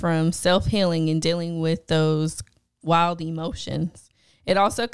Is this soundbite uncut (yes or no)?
yes